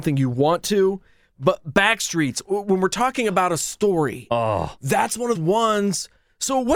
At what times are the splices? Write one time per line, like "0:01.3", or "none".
0:05.3